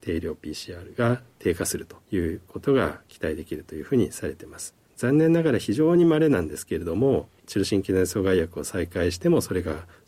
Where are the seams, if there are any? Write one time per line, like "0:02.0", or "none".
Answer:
0:02.0